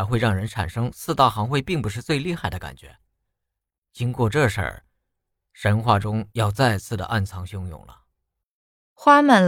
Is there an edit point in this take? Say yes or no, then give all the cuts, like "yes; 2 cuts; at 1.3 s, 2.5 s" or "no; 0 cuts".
no; 0 cuts